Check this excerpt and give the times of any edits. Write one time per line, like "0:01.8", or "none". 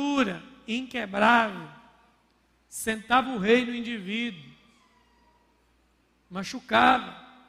none